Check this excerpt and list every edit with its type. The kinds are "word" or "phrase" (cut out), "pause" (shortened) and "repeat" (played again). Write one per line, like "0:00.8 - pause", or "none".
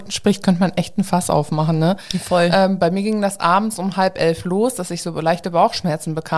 none